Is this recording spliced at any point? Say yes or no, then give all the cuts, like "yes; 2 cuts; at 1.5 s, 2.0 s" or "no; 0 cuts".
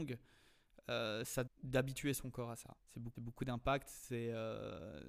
yes; 3 cuts; at 1.5 s, 2.8 s, 3.1 s